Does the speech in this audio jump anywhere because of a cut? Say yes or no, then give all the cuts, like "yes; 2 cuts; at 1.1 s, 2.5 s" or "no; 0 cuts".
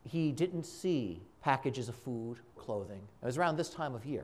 yes; 3 cuts; at 1.3 s, 2.6 s, 3.2 s